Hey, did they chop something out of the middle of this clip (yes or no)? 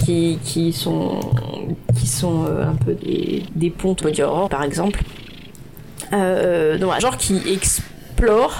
yes